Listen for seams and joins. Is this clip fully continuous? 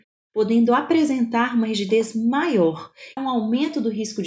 no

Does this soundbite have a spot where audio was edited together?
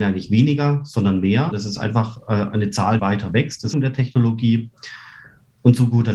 yes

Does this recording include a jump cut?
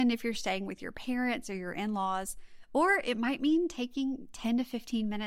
no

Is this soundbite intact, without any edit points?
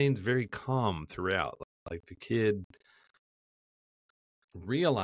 yes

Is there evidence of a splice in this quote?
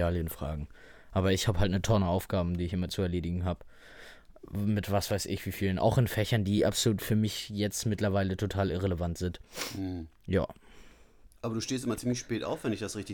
no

